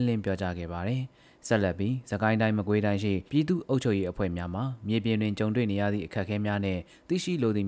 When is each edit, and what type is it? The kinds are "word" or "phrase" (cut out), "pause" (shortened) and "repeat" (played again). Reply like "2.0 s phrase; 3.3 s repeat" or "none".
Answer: 3.3 s pause